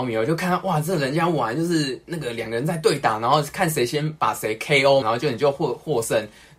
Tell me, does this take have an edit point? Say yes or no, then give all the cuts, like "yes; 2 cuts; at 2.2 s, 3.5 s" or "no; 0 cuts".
yes; 1 cut; at 5.0 s